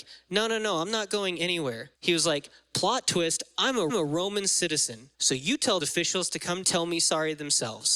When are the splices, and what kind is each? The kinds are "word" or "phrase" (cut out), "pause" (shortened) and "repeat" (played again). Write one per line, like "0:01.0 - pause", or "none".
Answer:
0:01.9 - pause
0:03.9 - repeat
0:05.1 - pause
0:05.8 - word
0:06.6 - phrase